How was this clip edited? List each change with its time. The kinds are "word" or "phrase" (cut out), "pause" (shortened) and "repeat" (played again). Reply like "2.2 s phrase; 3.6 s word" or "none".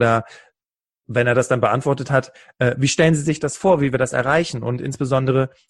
none